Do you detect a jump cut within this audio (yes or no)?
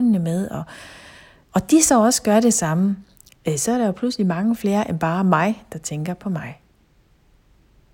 no